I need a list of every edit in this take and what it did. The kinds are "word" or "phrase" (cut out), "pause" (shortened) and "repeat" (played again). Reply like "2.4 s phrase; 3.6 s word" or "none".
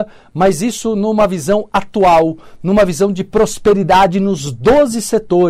none